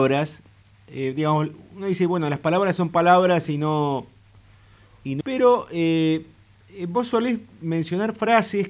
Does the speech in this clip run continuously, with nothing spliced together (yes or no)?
no